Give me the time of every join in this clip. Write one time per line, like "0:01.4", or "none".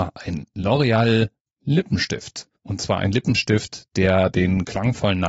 0:02.6